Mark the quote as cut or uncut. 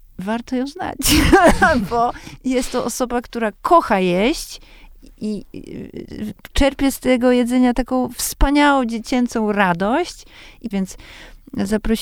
cut